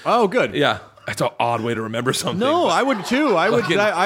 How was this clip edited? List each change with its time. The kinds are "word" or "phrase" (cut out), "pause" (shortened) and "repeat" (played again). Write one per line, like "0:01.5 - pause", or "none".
none